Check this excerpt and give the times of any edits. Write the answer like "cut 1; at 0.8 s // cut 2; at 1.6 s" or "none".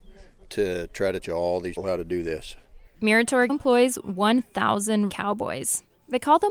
cut 1; at 1.2 s // cut 2; at 1.8 s // cut 3; at 3.5 s // cut 4; at 5.1 s

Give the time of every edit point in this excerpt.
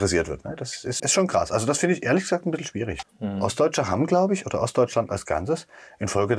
cut 1; at 1.0 s // cut 2; at 3.0 s

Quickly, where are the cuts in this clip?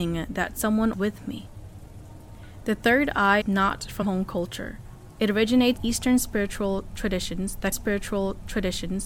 cut 1; at 0.9 s // cut 2; at 3.4 s // cut 3; at 4.0 s // cut 4; at 5.8 s // cut 5; at 7.7 s

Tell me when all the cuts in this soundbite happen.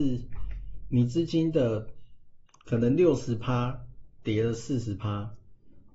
cut 1; at 2.5 s

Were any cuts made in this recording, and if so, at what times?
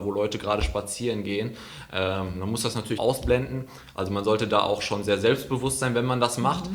cut 1; at 3.0 s

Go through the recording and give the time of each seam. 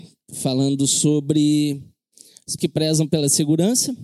cut 1; at 2.6 s

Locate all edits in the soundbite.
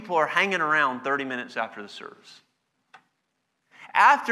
none

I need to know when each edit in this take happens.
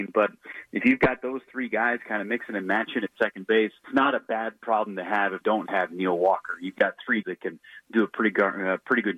cut 1; at 3.8 s // cut 2; at 5.4 s // cut 3; at 7.2 s

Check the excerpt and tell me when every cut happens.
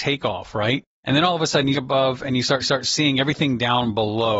cut 1; at 1.7 s // cut 2; at 2.6 s

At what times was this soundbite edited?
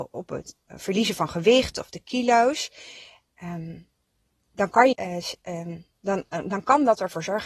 cut 1; at 4.9 s

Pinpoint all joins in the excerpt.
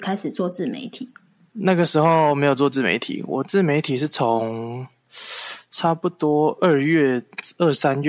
none

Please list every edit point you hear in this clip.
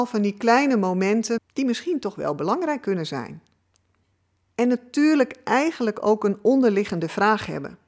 cut 1; at 1.4 s

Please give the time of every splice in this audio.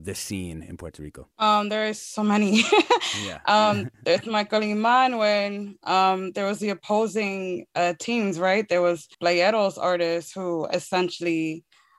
cut 1; at 1.3 s // cut 2; at 9.1 s

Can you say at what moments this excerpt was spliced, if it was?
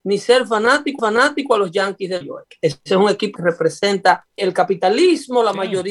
cut 1; at 1.0 s // cut 2; at 2.2 s // cut 3; at 3.4 s // cut 4; at 4.4 s

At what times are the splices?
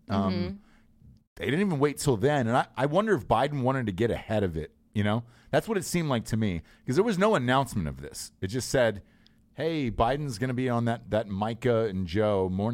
none

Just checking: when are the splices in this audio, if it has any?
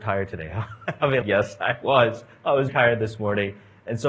cut 1; at 1.2 s // cut 2; at 2.7 s

